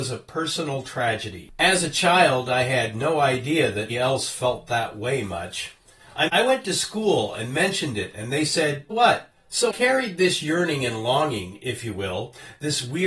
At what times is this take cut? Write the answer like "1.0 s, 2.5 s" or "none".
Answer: 3.9 s, 6.3 s, 8.9 s, 9.7 s